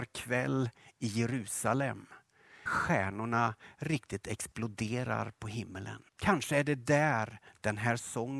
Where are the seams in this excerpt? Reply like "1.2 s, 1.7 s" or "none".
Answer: 2.7 s, 6.1 s